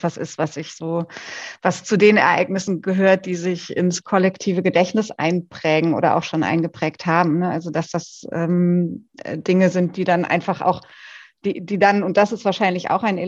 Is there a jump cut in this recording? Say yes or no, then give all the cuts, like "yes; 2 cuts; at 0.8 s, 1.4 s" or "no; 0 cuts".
no; 0 cuts